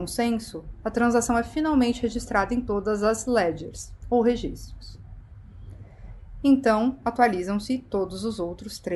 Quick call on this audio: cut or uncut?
uncut